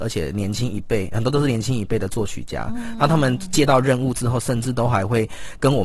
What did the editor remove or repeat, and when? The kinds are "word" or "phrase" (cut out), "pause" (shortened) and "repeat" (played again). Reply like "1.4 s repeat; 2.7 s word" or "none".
none